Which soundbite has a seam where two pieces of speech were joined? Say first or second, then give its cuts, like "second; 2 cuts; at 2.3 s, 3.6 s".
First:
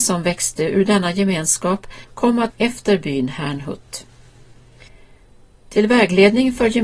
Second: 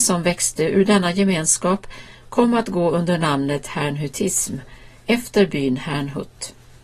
first; 2 cuts; at 2.0 s, 2.5 s